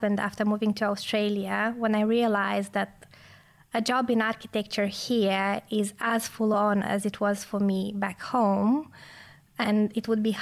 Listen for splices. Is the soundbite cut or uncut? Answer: uncut